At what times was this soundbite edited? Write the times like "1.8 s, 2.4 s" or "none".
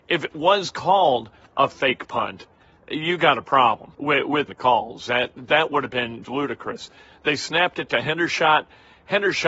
3.9 s, 4.5 s, 6.2 s